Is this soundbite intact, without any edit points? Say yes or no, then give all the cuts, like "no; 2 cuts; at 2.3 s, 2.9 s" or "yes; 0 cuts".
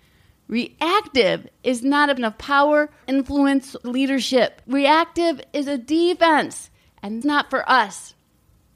no; 4 cuts; at 2.2 s, 3.0 s, 3.8 s, 7.2 s